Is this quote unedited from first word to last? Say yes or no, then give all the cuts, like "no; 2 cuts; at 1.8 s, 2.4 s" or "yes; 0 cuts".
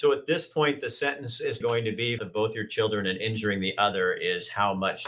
no; 2 cuts; at 1.6 s, 2.2 s